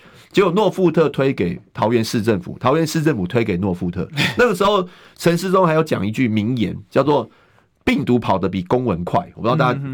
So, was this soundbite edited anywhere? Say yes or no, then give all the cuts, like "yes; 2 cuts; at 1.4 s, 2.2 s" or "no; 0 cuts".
no; 0 cuts